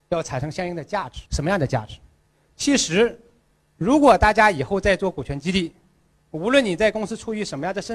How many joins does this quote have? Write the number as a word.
one